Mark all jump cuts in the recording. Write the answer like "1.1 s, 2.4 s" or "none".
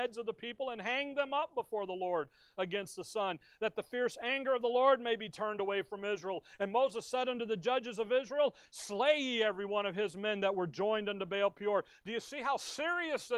none